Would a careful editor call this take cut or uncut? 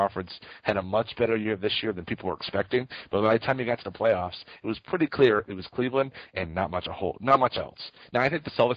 uncut